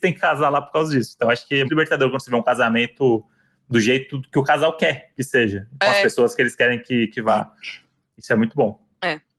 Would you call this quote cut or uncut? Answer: cut